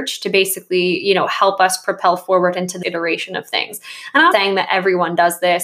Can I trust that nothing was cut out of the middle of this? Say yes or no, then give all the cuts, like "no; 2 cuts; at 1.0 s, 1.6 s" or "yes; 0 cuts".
no; 2 cuts; at 2.8 s, 4.3 s